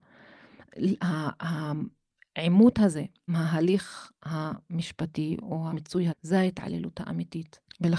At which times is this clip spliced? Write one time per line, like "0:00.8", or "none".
0:03.3
0:05.7
0:06.1

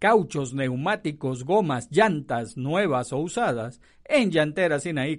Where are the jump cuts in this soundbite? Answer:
none

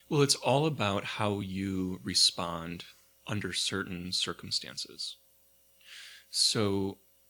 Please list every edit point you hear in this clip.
none

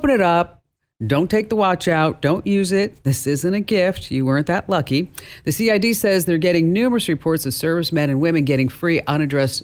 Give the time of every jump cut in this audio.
none

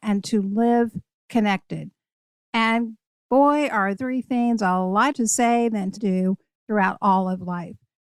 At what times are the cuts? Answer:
0:04.0
0:05.1
0:06.0

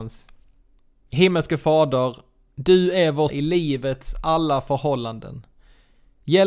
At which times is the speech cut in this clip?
0:03.3

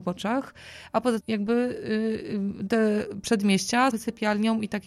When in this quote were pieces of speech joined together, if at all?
0:01.2
0:03.9

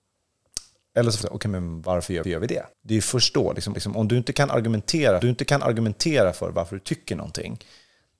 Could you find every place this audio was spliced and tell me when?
0:01.2
0:02.2
0:02.7
0:03.7
0:05.2

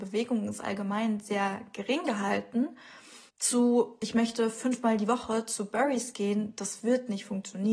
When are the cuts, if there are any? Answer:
0:03.3

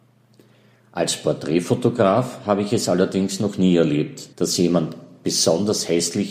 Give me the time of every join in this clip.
0:04.3

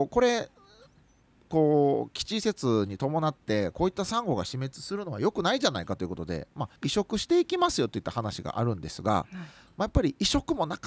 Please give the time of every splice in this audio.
0:06.8

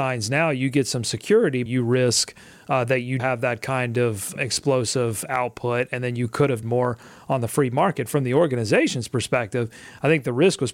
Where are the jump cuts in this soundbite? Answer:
0:01.7
0:03.2
0:04.4
0:06.6

